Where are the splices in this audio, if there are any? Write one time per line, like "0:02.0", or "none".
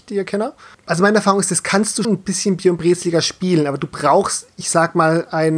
0:02.0